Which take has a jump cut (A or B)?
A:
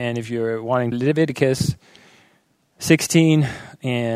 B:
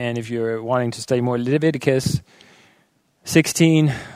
A